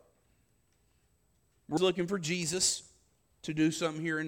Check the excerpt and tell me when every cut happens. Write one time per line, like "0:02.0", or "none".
0:01.8